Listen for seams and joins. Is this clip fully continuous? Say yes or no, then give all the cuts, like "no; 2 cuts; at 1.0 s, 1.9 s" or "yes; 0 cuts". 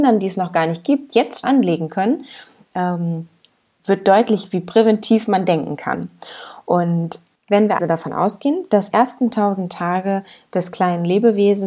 no; 3 cuts; at 1.4 s, 7.8 s, 8.9 s